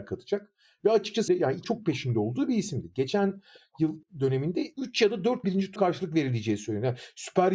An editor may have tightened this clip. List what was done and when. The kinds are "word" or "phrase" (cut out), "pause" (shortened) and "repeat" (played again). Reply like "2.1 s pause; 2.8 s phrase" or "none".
1.3 s word; 1.6 s word; 4.0 s word; 5.4 s word; 5.8 s word